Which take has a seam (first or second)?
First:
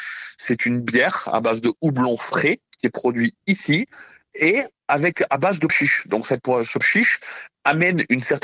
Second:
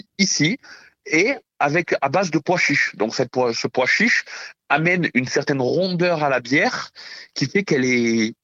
first